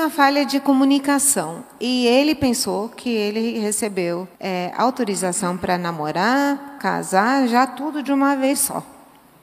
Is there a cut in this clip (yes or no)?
yes